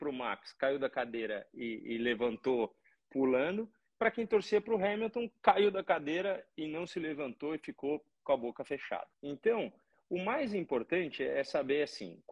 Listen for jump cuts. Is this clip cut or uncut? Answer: cut